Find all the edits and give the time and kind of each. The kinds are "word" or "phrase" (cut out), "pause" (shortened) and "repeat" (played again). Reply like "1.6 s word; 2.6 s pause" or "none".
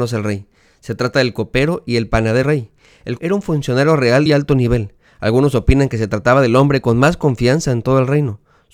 2.4 s word; 3.2 s word; 4.3 s word